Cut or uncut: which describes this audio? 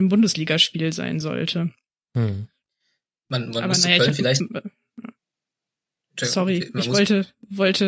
uncut